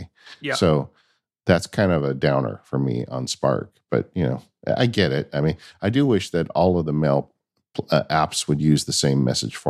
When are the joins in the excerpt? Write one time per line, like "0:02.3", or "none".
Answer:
none